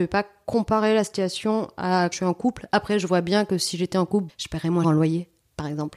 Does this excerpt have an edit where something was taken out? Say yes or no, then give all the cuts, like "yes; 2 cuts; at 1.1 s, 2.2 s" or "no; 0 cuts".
yes; 3 cuts; at 2.1 s, 4.3 s, 4.8 s